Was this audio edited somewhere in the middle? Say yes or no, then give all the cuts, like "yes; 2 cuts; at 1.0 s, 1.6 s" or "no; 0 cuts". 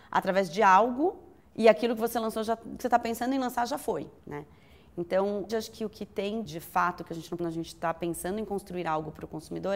yes; 6 cuts; at 1.4 s, 2.8 s, 4.2 s, 5.5 s, 6.4 s, 7.4 s